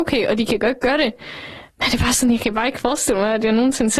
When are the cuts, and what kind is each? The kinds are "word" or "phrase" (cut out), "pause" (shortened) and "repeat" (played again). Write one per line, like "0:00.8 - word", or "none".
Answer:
none